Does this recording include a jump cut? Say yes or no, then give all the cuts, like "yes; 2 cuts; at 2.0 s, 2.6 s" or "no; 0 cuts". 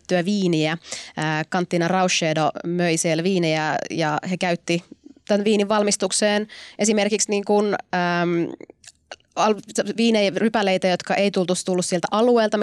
no; 0 cuts